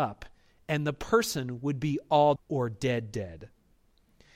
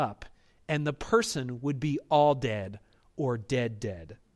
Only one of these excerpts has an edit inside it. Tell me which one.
first; 1 cut; at 2.4 s

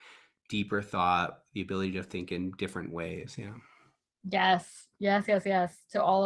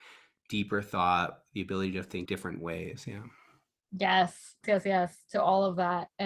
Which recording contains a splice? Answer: second; 2 cuts; at 2.3 s, 4.6 s

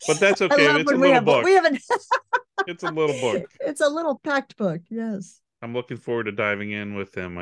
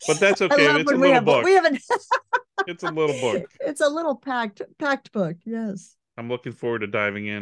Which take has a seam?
first; 1 cut; at 4.2 s

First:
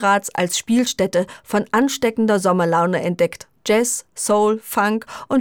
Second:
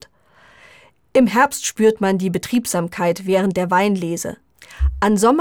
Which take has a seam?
first; 1 cut; at 3.6 s

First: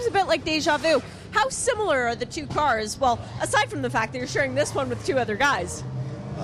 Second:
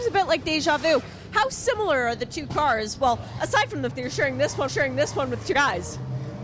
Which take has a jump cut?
second; 3 cuts; at 3.9 s, 4.7 s, 5.5 s

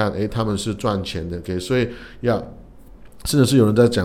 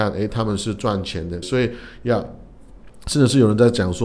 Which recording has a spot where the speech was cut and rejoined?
second; 1 cut; at 1.4 s

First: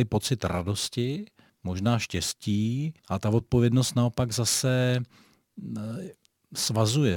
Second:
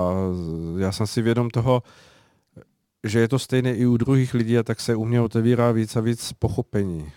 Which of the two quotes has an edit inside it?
first; 2 cuts; at 1.5 s, 3.0 s

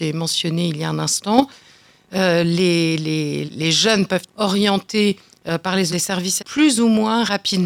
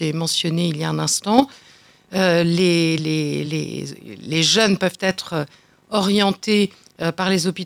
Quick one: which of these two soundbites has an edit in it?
first; 4 cuts; at 3.5 s, 4.3 s, 5.9 s, 6.4 s

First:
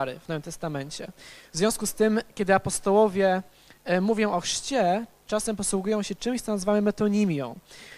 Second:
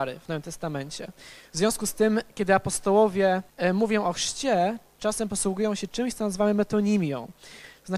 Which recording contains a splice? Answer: second; 1 cut; at 3.5 s

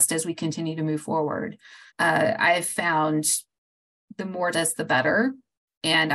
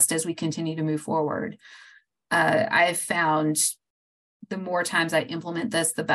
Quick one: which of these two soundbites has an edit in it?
first; 2 cuts; at 1.9 s, 4.5 s

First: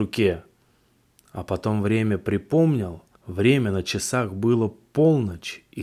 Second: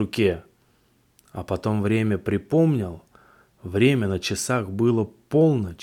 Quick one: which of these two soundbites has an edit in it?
first; 1 cut; at 3.1 s

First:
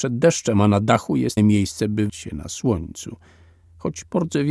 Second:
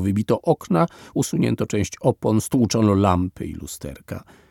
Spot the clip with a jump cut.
first; 2 cuts; at 1.4 s, 2.1 s

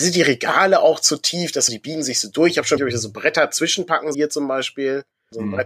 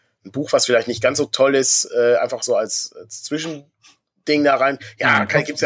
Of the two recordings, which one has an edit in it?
first; 3 cuts; at 1.7 s, 2.8 s, 4.1 s

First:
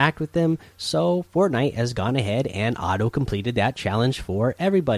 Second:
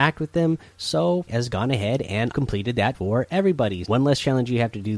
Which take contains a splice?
second; 4 cuts; at 1.3 s, 2.3 s, 2.9 s, 3.8 s

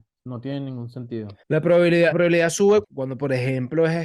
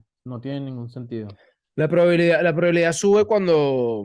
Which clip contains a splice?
first; 3 cuts; at 1.4 s, 2.1 s, 2.8 s

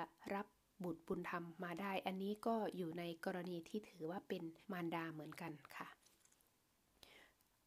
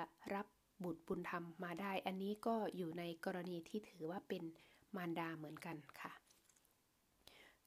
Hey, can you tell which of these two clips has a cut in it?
first; 1 cut; at 4.6 s

